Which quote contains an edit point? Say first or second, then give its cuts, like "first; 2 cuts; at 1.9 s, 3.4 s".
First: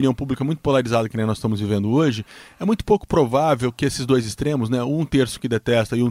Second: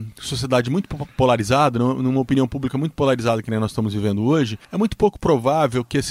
second; 1 cut; at 4.6 s